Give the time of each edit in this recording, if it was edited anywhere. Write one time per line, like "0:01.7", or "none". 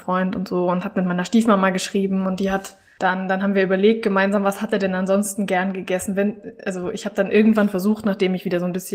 none